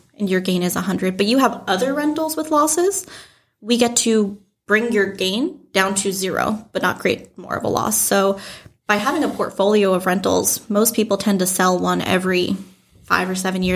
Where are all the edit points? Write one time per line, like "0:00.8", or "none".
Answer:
none